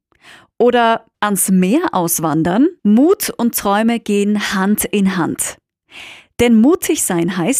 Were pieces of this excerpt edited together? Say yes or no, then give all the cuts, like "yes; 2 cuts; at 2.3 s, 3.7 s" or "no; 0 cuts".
yes; 2 cuts; at 1.1 s, 2.8 s